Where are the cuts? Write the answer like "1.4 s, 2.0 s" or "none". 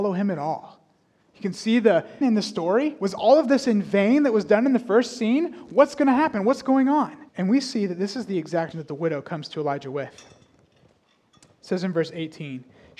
2.2 s, 7.3 s, 8.7 s